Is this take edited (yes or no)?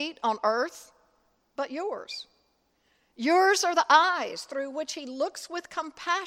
no